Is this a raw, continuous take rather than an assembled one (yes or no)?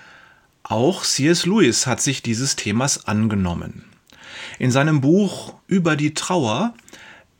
no